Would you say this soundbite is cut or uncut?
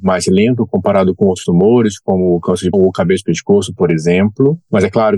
cut